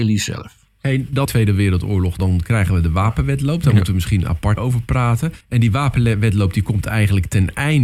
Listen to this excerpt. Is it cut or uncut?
cut